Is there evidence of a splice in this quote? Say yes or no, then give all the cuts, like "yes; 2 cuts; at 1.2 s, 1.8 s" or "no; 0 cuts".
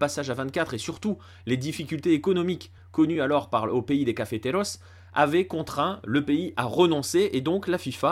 no; 0 cuts